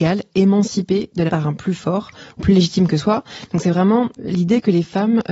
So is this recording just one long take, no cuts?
no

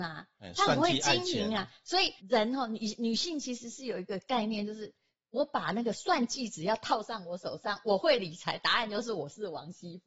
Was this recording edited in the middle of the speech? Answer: yes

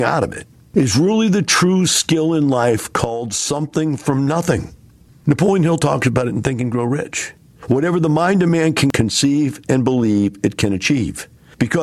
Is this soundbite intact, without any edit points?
yes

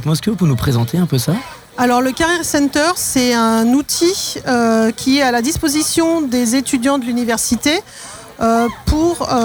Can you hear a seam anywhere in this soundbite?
no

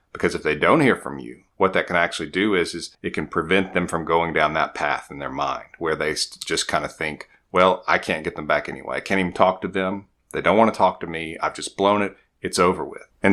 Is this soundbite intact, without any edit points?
no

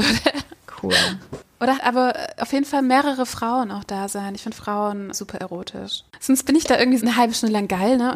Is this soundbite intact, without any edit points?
no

